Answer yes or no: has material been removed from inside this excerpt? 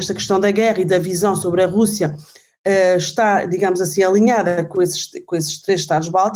no